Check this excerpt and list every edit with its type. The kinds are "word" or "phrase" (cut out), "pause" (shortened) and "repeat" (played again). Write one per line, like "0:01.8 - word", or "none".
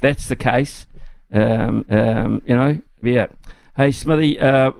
0:01.8 - repeat
0:03.0 - word